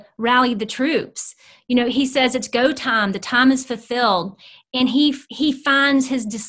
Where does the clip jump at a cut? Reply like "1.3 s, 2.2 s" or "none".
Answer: none